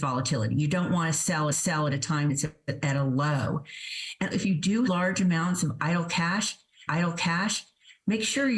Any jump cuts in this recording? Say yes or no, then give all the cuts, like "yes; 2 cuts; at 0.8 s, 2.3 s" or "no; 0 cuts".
yes; 5 cuts; at 1.5 s, 2.3 s, 4.3 s, 4.9 s, 6.9 s